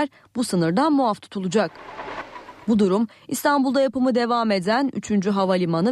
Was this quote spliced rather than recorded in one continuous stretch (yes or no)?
no